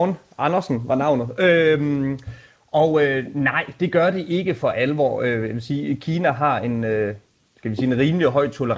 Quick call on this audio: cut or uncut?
uncut